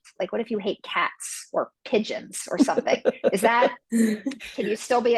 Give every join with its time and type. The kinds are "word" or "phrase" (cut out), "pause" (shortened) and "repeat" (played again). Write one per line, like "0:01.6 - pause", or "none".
0:03.8 - pause